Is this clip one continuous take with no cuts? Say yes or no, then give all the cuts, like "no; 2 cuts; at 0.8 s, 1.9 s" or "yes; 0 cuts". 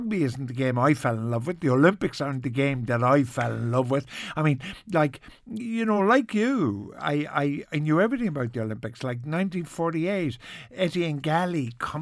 yes; 0 cuts